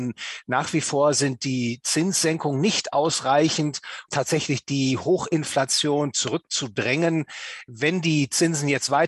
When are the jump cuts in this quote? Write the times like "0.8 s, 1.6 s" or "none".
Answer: 4.1 s

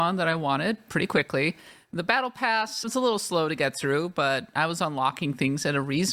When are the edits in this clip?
2.8 s

